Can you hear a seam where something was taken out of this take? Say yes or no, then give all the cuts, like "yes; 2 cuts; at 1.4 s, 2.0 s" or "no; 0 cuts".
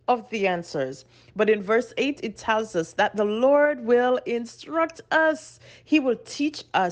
no; 0 cuts